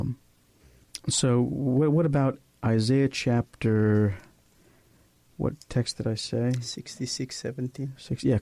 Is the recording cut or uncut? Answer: uncut